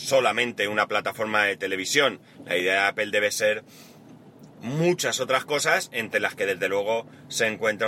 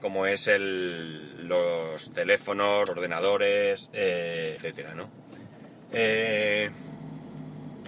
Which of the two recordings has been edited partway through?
second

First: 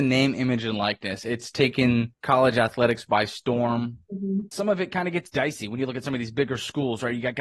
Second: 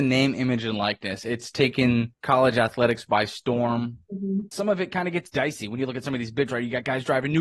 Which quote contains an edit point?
second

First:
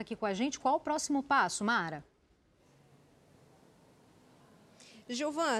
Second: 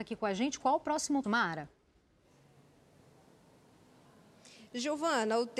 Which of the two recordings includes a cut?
second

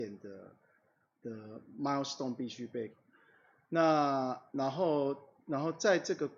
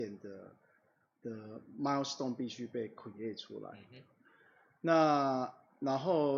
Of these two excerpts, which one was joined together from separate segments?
first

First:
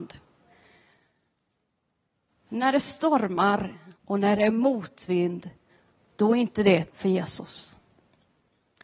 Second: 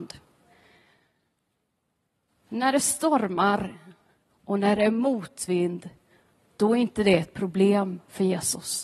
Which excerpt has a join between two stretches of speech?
first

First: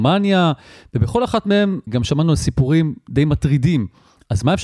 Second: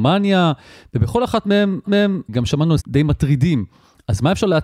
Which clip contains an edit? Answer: second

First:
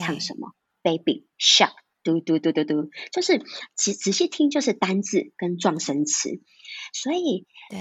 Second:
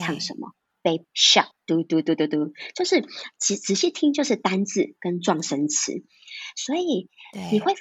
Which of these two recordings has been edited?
second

